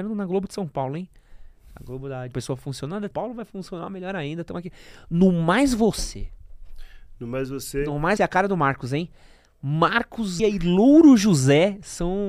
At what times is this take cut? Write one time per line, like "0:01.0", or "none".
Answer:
0:02.3
0:03.1
0:08.2
0:10.4